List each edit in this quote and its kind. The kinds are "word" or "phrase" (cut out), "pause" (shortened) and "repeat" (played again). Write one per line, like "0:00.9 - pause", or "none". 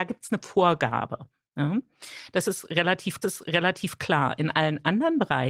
0:03.2 - repeat